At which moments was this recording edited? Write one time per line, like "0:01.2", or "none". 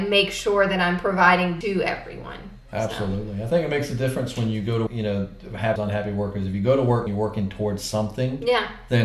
0:01.6
0:04.9
0:05.8
0:07.1